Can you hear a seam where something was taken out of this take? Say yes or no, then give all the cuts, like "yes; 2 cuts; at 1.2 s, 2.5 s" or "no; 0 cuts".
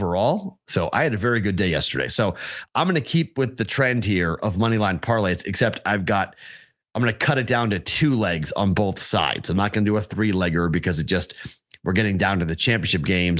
no; 0 cuts